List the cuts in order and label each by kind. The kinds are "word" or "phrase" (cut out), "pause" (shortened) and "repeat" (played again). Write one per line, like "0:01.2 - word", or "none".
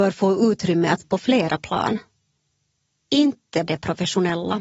0:01.0 - word
0:03.6 - word